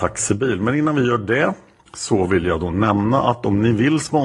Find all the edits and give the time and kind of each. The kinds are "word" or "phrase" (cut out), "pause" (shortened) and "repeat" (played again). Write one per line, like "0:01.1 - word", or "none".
0:01.8 - pause